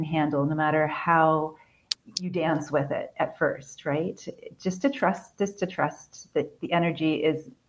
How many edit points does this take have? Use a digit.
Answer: 0